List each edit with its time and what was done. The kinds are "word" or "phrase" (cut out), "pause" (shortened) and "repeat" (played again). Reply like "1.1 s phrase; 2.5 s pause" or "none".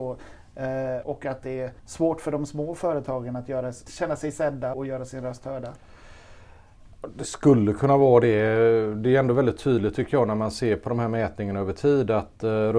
1.0 s word; 1.8 s pause; 3.9 s word; 4.7 s word